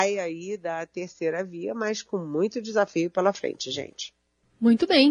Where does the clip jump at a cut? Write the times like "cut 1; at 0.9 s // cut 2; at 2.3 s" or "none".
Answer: none